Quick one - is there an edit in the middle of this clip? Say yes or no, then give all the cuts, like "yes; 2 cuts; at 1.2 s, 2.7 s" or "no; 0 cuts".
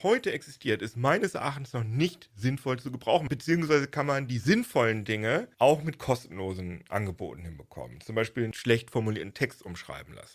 no; 0 cuts